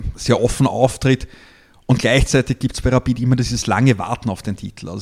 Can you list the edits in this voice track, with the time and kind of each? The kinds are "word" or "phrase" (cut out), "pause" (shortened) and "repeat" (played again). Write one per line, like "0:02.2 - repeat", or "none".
none